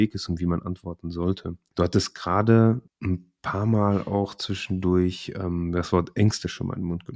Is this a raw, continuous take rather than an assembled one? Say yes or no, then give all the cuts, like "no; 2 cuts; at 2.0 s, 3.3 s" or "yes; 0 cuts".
yes; 0 cuts